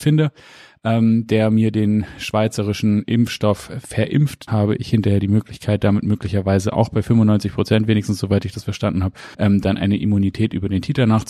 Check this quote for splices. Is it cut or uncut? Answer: cut